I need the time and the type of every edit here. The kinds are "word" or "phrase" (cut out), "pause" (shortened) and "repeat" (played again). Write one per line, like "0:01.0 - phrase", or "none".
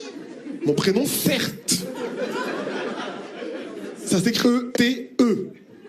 0:01.0 - word
0:04.4 - word
0:04.7 - word